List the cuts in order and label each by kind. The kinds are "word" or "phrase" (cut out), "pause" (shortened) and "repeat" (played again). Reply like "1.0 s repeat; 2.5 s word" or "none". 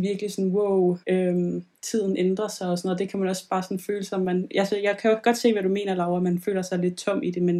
1.0 s pause

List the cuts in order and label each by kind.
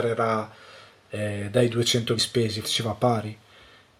2.2 s word; 2.6 s word

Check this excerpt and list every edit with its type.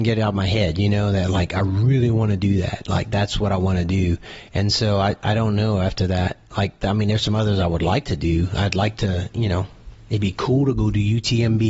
none

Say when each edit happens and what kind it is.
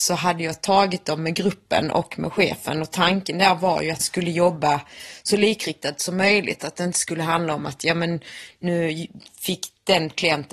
4.0 s word

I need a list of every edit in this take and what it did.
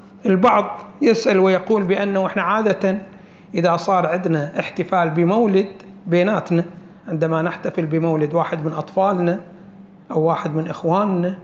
none

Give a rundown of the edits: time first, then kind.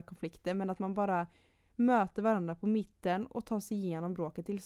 none

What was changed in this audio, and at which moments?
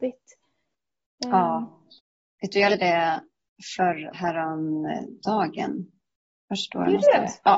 2.7 s word; 4.1 s word

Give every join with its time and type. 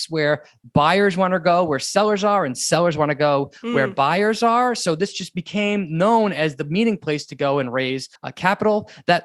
8.2 s pause

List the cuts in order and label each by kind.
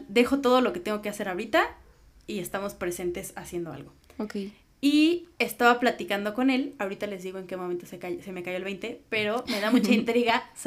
5.3 s pause

